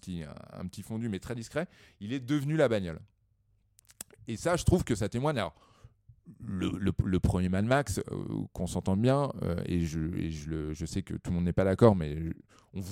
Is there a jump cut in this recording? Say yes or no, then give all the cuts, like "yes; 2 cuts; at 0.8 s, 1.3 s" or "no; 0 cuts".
no; 0 cuts